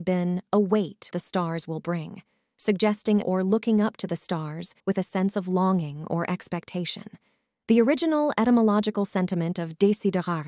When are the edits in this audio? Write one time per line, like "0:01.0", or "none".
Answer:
0:01.1
0:03.2
0:04.8